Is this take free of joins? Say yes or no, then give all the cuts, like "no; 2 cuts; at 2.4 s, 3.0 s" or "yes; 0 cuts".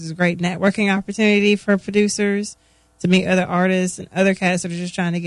yes; 0 cuts